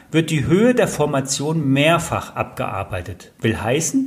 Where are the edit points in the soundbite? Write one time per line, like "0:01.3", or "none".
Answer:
none